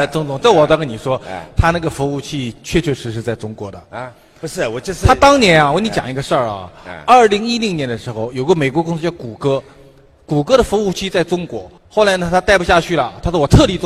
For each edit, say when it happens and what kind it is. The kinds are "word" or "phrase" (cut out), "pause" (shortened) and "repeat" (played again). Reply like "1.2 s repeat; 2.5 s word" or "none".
11.8 s pause

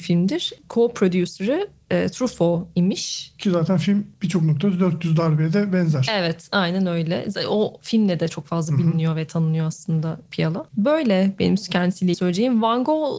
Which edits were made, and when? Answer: 10.7 s pause; 12.1 s word

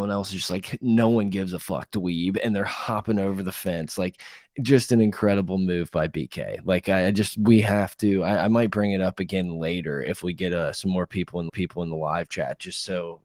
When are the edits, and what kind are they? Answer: 11.5 s repeat

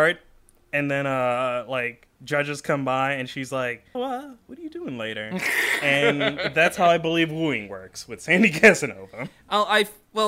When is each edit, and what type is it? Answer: 3.9 s word

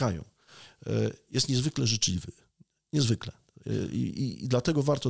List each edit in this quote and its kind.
none

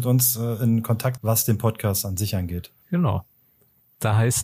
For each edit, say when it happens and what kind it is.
1.2 s word

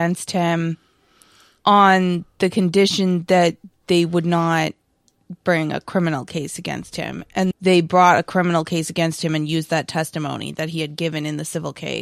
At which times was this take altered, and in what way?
7.5 s word

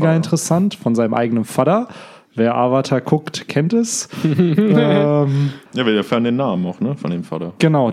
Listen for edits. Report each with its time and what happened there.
5.7 s pause

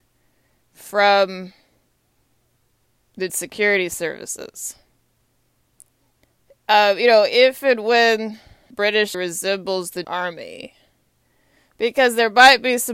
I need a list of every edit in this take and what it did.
3.3 s word; 8.7 s word; 9.1 s word; 10.0 s word

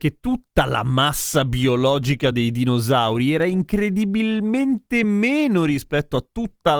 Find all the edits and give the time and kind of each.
none

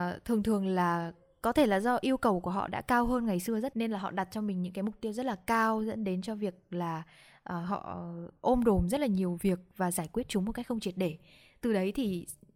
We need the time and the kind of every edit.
3.7 s word

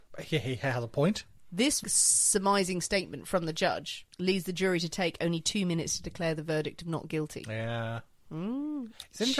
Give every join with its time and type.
none

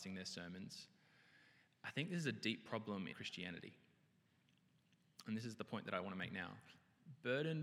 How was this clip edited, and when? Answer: 3.1 s word

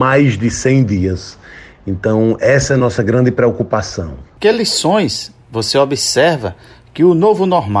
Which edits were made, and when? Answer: none

